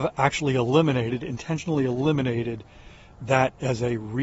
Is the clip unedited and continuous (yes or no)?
yes